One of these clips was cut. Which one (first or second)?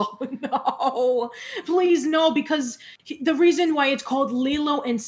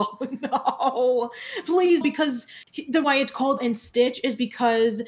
second